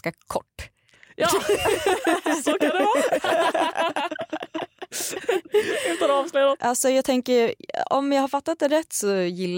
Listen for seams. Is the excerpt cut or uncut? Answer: uncut